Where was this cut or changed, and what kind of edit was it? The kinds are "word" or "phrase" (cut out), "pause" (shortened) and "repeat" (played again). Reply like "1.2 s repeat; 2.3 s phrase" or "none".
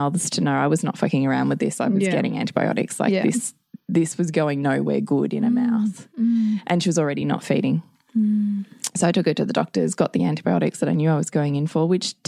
none